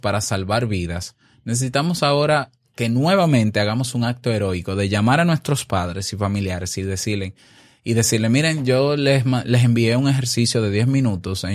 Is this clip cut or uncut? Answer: uncut